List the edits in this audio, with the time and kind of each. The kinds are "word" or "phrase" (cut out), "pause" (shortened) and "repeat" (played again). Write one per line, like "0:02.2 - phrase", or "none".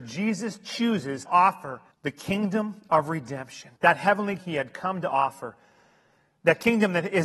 0:01.2 - word
0:01.9 - pause
0:03.8 - pause
0:04.4 - word